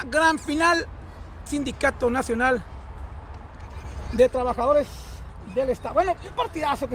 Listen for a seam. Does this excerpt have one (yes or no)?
yes